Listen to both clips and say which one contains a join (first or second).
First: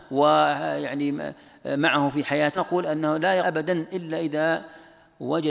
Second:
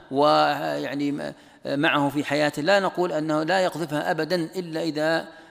first